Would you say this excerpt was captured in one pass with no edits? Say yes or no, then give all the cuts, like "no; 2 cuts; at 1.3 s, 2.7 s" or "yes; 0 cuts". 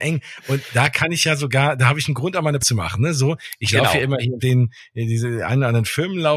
no; 2 cuts; at 2.6 s, 4.4 s